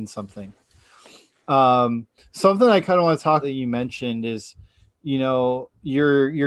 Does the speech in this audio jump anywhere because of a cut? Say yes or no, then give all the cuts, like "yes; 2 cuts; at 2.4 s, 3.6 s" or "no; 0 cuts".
yes; 1 cut; at 3.4 s